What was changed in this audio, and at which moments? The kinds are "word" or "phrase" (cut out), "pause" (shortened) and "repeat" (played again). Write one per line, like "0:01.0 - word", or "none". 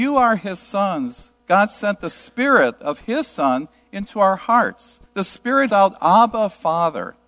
0:01.4 - pause
0:05.1 - pause
0:05.7 - phrase